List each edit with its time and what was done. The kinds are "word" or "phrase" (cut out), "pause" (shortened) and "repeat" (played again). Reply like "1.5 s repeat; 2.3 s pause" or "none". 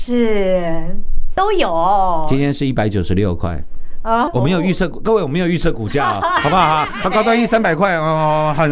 4.3 s word